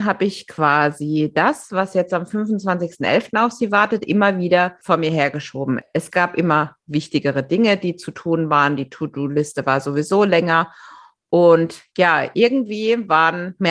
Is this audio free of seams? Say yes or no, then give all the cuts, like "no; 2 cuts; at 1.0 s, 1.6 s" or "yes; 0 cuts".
yes; 0 cuts